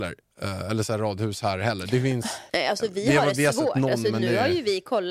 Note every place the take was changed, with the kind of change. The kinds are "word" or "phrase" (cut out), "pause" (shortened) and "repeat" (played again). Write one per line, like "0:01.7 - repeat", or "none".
0:02.5 - pause